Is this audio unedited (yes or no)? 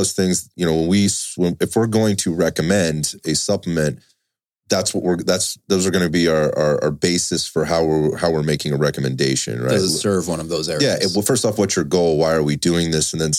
yes